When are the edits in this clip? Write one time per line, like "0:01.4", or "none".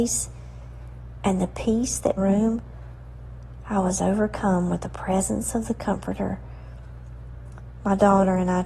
0:02.2